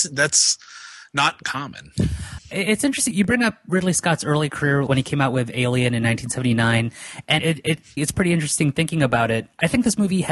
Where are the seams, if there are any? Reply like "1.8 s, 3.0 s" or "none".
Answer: 2.4 s, 3.1 s, 4.9 s, 7.4 s, 8.0 s